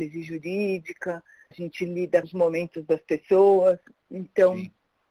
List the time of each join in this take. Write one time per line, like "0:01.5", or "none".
0:01.5
0:02.2